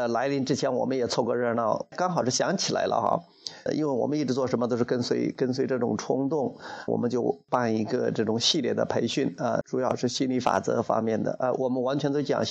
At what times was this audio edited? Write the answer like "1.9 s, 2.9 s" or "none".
1.9 s, 3.7 s, 6.9 s, 9.6 s

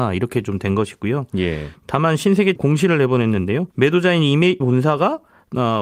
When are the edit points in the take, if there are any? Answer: 2.6 s, 3.7 s, 4.6 s

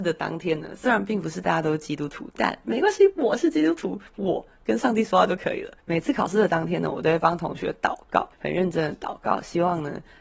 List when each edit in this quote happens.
4.1 s, 5.8 s, 8.3 s

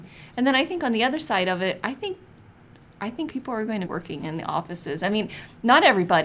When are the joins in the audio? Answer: 3.3 s, 3.8 s

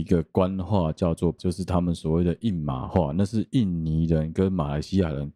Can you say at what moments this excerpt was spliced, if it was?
1.4 s

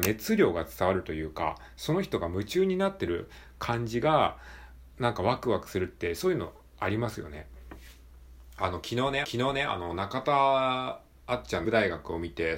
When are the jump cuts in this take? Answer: 9.2 s, 11.6 s

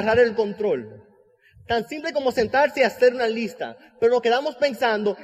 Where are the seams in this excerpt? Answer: none

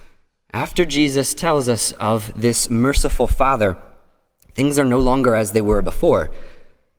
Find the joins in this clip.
none

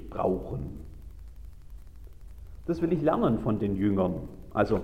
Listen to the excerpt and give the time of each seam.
none

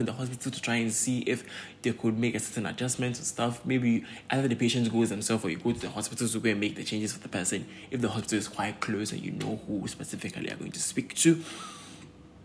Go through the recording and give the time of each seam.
none

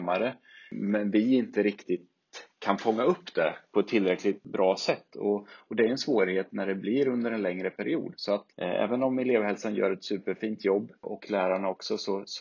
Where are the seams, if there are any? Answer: 2.5 s, 8.5 s

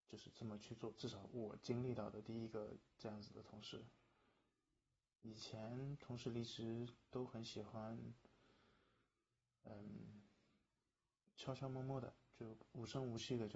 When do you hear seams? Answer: none

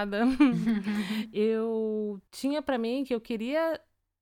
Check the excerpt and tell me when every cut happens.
2.3 s

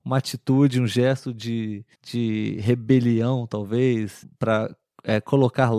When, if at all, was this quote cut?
1.9 s, 4.2 s

